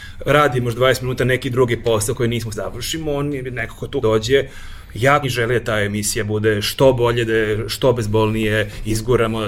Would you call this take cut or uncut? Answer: cut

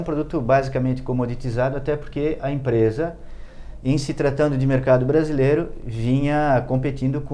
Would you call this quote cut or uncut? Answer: uncut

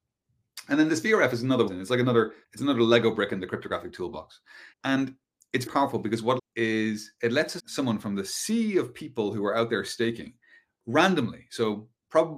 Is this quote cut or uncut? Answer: cut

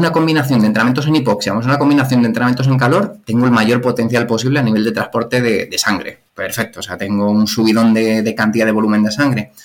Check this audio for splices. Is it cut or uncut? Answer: cut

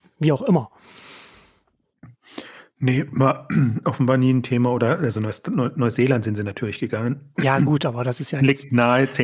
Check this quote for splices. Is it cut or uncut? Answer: uncut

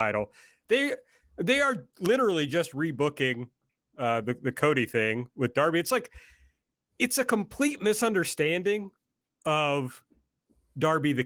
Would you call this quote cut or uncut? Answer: uncut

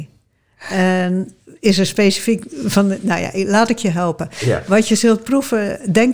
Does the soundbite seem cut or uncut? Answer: uncut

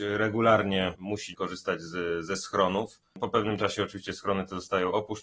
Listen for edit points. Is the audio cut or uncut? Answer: cut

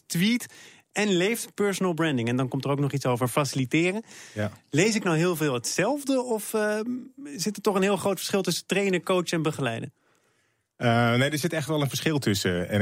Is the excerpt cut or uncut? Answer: uncut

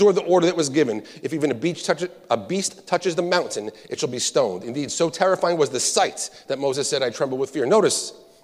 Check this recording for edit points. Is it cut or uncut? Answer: uncut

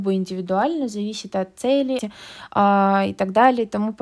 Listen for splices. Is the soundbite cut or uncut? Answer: cut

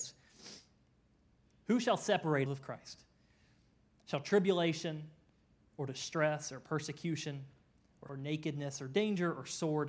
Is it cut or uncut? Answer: cut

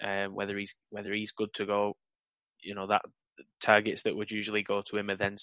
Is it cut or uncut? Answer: uncut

